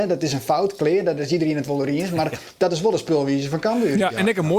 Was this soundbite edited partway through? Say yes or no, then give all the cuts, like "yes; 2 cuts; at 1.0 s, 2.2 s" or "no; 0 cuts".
no; 0 cuts